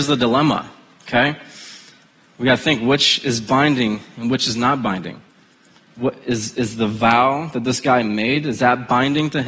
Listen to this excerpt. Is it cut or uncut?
uncut